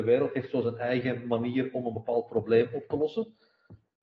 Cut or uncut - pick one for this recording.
uncut